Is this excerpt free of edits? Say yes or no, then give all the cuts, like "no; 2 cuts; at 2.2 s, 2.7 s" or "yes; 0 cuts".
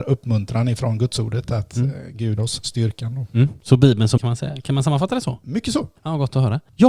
no; 2 cuts; at 2.4 s, 4.2 s